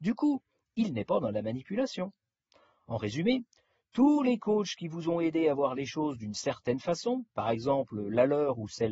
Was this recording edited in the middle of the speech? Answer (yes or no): yes